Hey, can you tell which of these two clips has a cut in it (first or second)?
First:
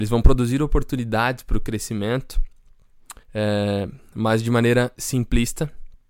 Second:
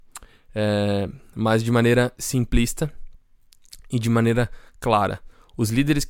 first